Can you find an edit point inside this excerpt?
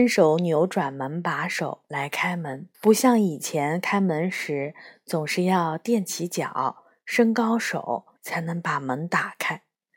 yes; 2 cuts; at 2.7 s, 8.2 s

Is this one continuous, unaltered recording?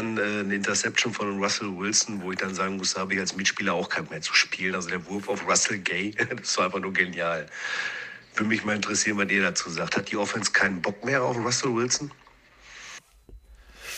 no; 1 cut; at 4.1 s

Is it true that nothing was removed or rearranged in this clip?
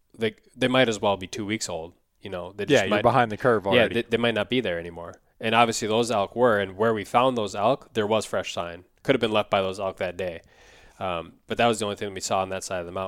yes; 0 cuts

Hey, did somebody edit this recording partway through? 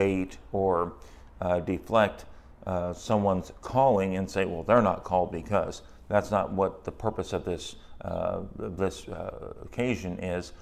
no; 0 cuts

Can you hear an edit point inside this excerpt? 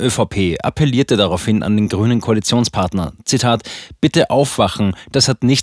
no; 0 cuts

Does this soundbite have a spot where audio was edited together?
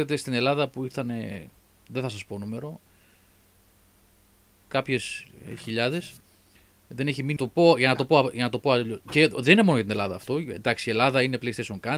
yes; 1 cut; at 7.4 s

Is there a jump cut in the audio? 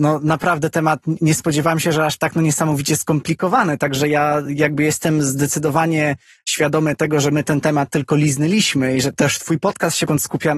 no; 0 cuts

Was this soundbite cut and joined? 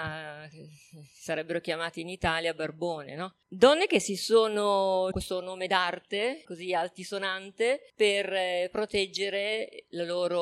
yes; 2 cuts; at 5.1 s, 6.4 s

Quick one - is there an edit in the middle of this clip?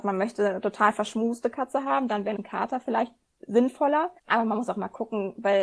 yes; 2 cuts; at 2.4 s, 4.2 s

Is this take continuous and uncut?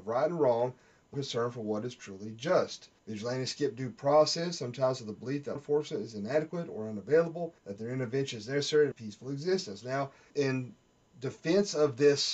no; 6 cuts; at 1.1 s, 3.0 s, 5.6 s, 7.6 s, 8.9 s, 10.3 s

